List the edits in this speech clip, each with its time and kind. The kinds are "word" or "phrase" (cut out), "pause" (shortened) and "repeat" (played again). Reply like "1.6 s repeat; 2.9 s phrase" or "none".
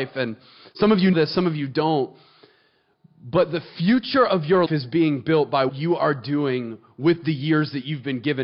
1.1 s word; 4.7 s word; 5.7 s word